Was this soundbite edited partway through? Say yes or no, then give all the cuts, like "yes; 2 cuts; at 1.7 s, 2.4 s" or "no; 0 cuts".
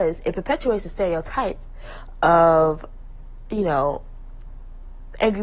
no; 0 cuts